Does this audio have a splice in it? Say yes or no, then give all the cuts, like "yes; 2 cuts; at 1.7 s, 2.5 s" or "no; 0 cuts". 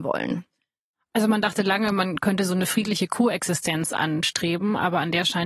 no; 0 cuts